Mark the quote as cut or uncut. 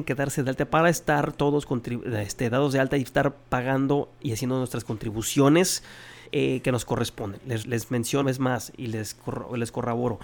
cut